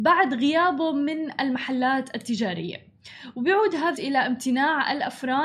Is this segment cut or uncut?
cut